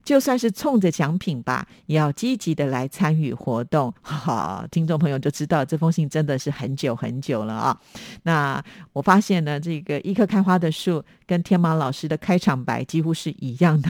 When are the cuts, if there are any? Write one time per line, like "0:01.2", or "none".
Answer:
0:04.0